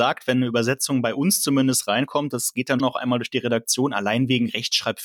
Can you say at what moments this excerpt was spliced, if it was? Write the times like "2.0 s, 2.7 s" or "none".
2.8 s